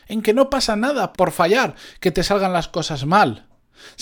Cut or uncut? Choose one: cut